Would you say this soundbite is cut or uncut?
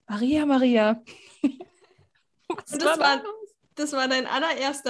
uncut